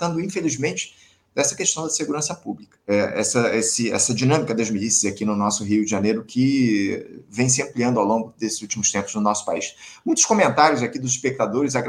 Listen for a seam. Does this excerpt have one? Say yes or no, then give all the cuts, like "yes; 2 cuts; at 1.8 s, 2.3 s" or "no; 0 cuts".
yes; 1 cut; at 2.8 s